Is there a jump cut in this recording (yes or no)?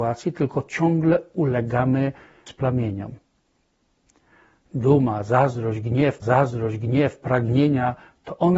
yes